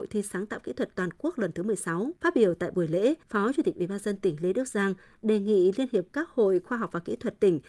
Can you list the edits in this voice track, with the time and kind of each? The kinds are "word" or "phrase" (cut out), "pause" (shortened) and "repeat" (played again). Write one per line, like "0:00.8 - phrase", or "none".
0:02.2 - pause
0:03.2 - pause